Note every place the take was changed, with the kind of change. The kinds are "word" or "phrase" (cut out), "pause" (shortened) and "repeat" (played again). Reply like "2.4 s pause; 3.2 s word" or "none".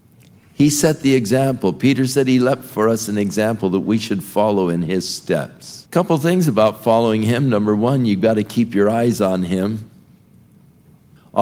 5.9 s pause

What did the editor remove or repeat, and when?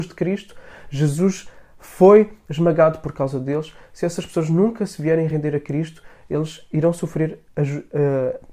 7.5 s pause

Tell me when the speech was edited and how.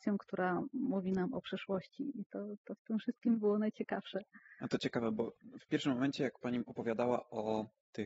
none

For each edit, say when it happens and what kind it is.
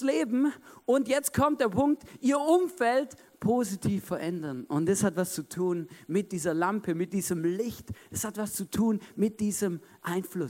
none

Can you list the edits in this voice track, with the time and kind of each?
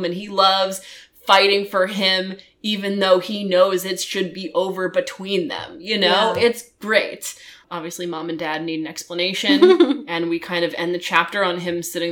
none

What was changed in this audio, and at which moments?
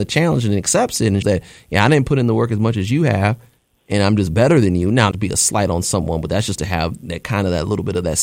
1.2 s word; 5.1 s phrase; 7.0 s word

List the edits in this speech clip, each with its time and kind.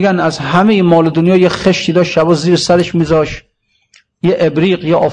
none

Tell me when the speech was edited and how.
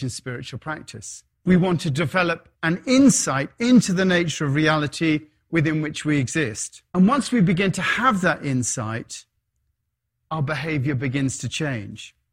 1.3 s pause; 2.5 s pause; 6.9 s pause

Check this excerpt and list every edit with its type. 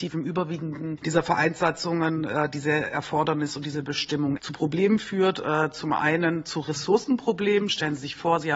1.0 s word; 4.4 s phrase

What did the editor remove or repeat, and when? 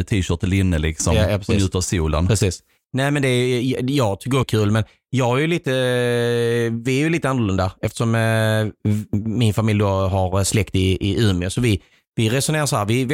4.4 s phrase

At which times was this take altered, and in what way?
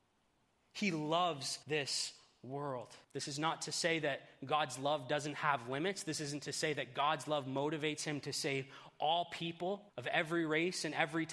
1.6 s pause; 3.0 s pause; 9.9 s pause

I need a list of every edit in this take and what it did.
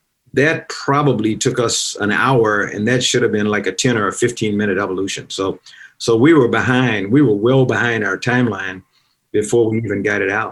none

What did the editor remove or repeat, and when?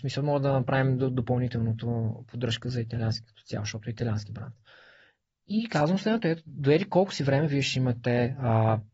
6.5 s word

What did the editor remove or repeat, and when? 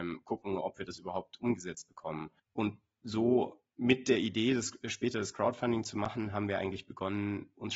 2.4 s pause; 3.7 s pause

